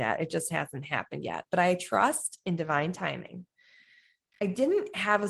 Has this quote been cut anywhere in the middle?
no; 0 cuts

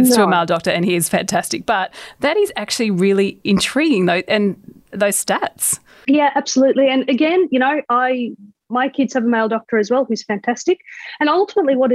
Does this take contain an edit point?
no; 0 cuts

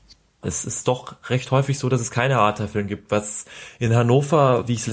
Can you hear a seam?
no; 0 cuts

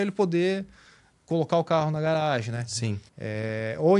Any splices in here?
yes; 1 cut; at 3.1 s

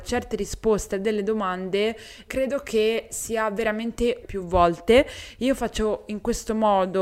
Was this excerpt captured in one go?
no; 2 cuts; at 2.3 s, 4.2 s

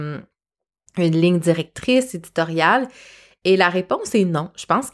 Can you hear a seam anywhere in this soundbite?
no; 0 cuts

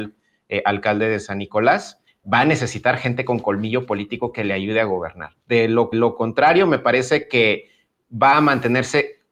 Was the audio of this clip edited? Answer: yes; 1 cut; at 5.9 s

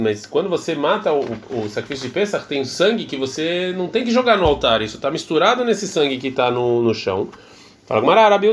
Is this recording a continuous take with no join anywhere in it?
yes; 0 cuts

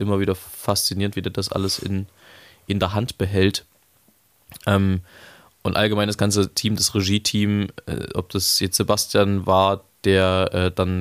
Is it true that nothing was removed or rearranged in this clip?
yes; 0 cuts

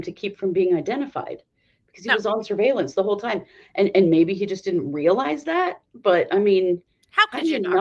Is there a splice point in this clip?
no; 0 cuts

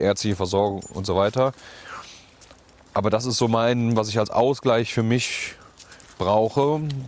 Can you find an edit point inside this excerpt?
no; 0 cuts

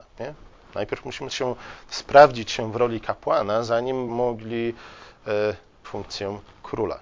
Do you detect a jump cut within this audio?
yes; 3 cuts; at 1.3 s, 4.1 s, 5.8 s

